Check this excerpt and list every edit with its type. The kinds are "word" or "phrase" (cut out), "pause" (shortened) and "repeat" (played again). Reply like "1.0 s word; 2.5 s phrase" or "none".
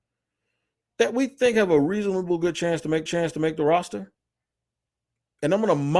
3.1 s repeat